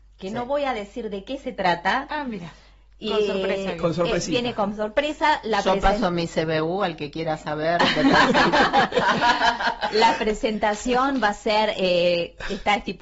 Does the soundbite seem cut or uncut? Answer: uncut